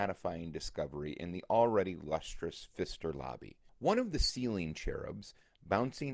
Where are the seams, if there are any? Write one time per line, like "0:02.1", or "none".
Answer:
0:03.7